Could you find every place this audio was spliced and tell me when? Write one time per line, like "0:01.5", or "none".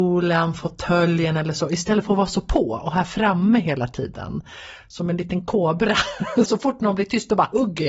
0:06.5